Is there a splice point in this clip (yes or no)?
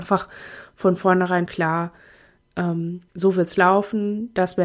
yes